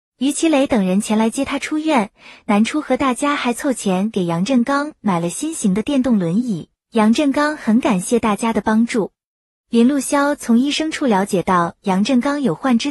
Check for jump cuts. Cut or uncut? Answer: uncut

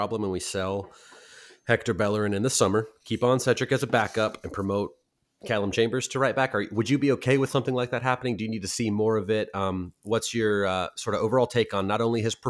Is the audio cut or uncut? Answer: uncut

